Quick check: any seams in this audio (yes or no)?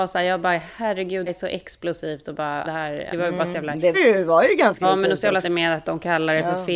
yes